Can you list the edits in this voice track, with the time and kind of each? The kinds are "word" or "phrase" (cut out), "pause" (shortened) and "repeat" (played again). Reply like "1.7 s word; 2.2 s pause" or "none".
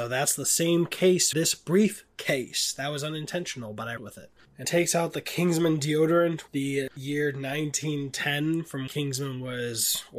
1.3 s word; 4.0 s word; 4.6 s word; 6.5 s word; 8.9 s word